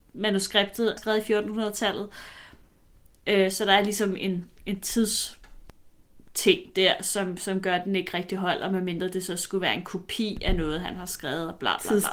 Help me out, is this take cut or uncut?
cut